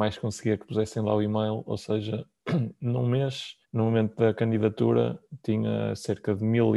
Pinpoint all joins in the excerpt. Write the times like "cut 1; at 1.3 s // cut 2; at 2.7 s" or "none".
cut 1; at 3.6 s